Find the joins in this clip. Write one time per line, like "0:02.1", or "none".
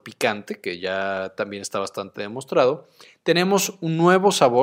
none